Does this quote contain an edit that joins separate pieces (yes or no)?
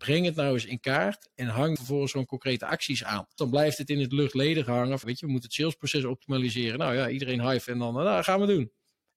yes